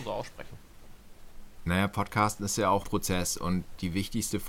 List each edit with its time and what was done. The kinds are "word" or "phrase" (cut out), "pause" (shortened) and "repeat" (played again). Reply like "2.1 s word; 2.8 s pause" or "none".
2.8 s word

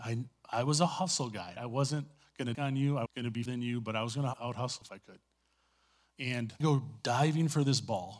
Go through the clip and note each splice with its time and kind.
1.6 s word; 2.5 s word; 3.1 s word; 3.5 s word; 4.3 s word; 4.8 s word; 6.6 s word

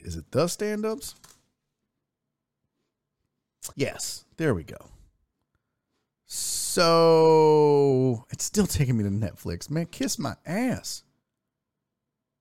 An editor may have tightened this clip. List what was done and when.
3.7 s pause

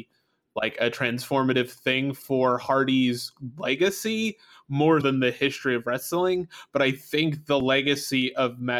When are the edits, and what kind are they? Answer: 5.0 s word

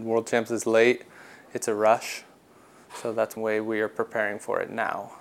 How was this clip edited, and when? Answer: 3.4 s word

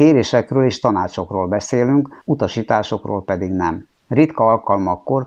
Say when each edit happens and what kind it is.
2.2 s pause; 3.9 s pause

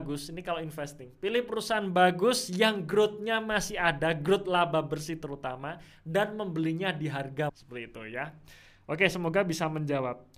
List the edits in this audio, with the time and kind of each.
7.5 s word

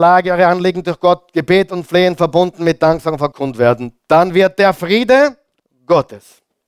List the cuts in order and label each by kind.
3.3 s word

